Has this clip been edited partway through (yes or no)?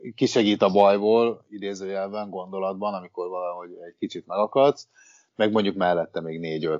no